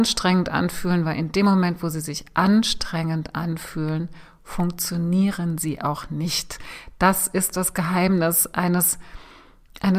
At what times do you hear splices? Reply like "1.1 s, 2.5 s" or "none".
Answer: none